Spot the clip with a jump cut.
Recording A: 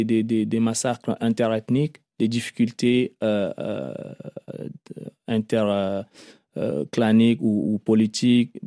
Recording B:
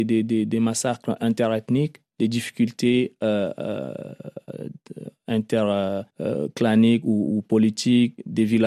B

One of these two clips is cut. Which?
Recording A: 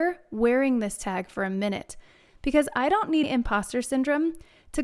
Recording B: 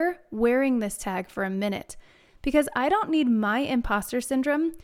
A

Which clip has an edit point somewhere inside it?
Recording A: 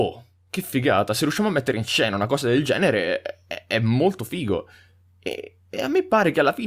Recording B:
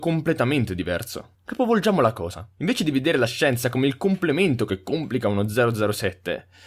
B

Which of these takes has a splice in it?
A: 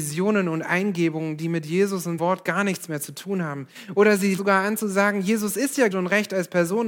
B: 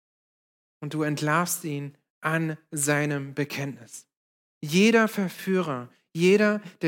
A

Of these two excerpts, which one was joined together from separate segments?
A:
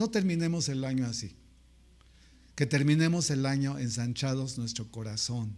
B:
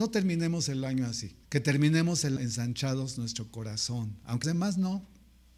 B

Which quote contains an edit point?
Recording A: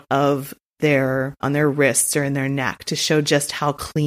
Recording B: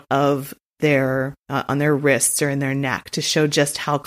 A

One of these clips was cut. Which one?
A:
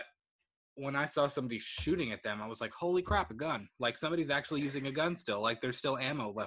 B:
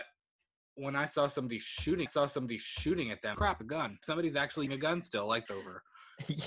B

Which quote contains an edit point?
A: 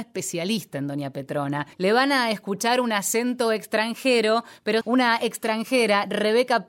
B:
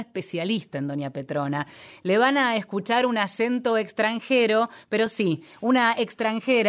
A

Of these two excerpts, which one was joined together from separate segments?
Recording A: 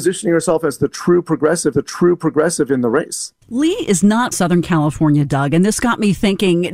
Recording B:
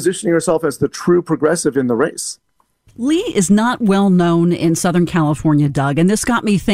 A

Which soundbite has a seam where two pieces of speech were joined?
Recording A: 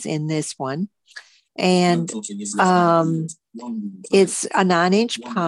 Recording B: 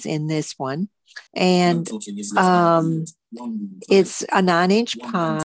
B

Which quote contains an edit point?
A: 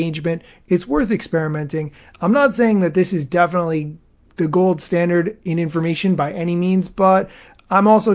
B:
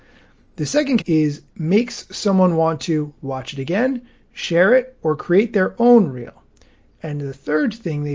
B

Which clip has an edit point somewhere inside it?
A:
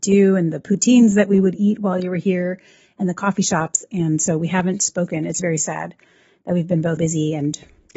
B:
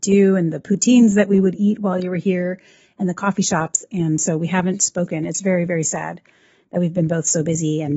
A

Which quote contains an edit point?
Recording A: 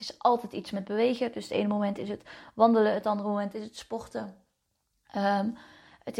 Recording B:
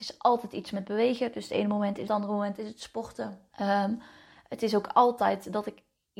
B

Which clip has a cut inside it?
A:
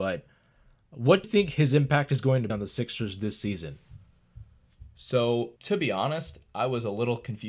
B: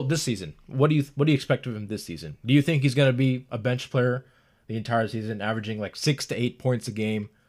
A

